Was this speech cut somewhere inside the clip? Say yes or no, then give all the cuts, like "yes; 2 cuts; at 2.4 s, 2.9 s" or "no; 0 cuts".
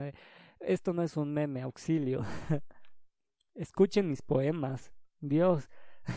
no; 0 cuts